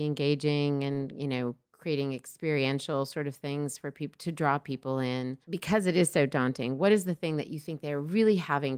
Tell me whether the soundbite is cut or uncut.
cut